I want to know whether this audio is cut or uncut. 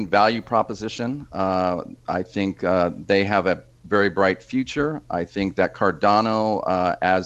uncut